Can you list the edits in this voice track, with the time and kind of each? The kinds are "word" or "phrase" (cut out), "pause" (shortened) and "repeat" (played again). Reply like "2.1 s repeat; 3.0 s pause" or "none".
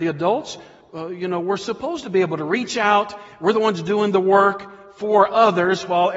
none